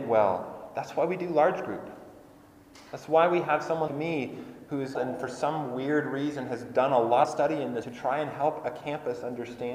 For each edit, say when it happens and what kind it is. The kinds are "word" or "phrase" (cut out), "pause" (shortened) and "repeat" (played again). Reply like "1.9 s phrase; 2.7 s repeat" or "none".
3.9 s word; 4.9 s word; 7.2 s word; 7.8 s word